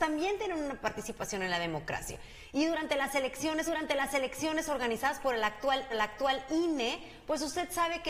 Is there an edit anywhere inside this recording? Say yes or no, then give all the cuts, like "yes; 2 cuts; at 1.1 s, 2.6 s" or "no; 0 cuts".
yes; 2 cuts; at 3.7 s, 5.9 s